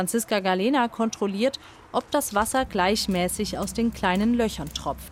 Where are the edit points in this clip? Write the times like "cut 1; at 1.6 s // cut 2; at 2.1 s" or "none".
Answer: none